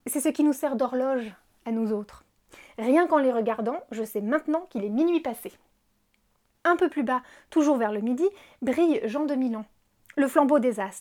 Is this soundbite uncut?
yes; 0 cuts

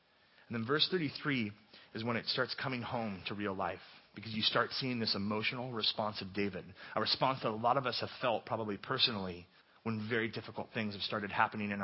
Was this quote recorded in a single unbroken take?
no; 1 cut; at 9.6 s

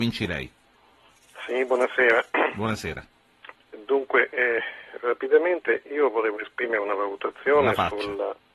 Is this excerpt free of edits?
yes; 0 cuts

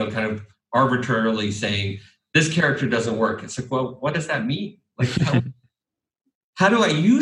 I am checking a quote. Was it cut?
no; 0 cuts

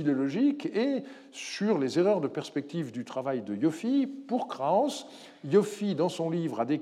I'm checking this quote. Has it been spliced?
no; 0 cuts

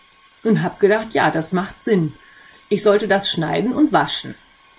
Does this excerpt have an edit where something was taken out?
no; 0 cuts

